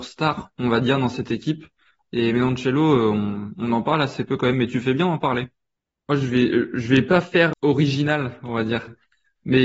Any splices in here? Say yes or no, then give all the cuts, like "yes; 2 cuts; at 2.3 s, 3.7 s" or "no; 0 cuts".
no; 0 cuts